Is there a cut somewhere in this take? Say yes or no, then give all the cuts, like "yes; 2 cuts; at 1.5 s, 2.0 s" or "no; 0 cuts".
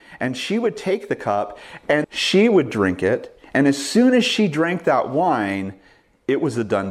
yes; 1 cut; at 2.0 s